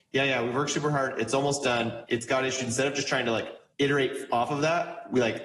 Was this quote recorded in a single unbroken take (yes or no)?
yes